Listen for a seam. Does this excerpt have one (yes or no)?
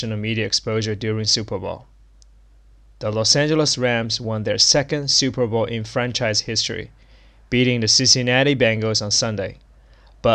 no